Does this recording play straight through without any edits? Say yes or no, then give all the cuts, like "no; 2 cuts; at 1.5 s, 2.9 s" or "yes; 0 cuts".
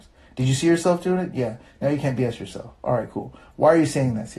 yes; 0 cuts